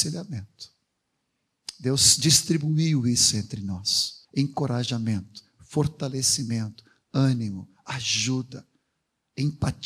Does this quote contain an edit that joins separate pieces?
yes; 1 cut; at 4.2 s

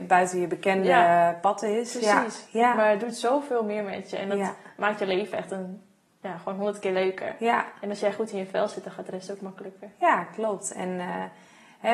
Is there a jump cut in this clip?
no; 0 cuts

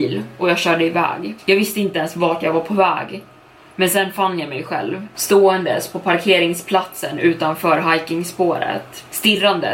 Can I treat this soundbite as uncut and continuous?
yes; 0 cuts

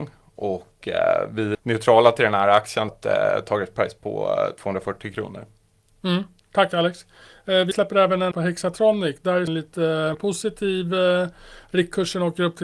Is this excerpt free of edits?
no; 6 cuts; at 1.5 s, 2.9 s, 7.7 s, 8.3 s, 9.5 s, 10.1 s

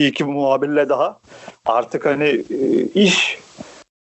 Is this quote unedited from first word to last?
yes; 0 cuts

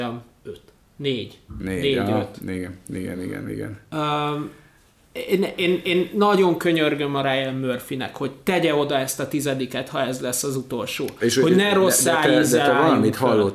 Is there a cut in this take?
yes; 2 cuts; at 3.2 s, 5.8 s

